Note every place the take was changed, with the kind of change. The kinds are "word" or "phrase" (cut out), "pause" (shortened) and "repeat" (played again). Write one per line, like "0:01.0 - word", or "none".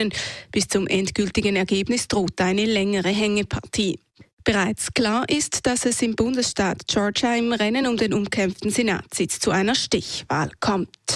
none